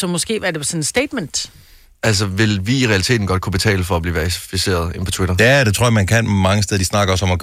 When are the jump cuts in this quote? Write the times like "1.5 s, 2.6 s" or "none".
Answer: none